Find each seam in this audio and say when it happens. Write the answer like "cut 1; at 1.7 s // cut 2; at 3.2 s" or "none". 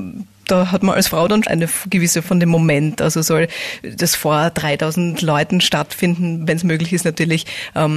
cut 1; at 1.4 s // cut 2; at 2.2 s